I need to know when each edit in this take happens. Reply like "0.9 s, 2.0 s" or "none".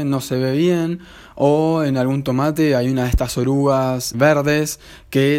4.1 s